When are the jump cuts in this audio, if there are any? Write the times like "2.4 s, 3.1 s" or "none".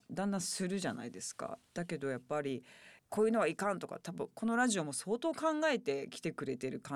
3.0 s

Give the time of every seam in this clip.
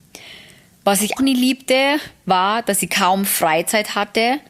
1.2 s

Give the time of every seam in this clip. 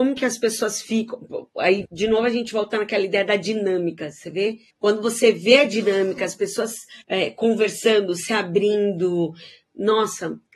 1.9 s, 4.7 s, 7.0 s

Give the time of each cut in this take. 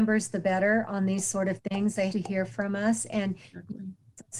2.1 s

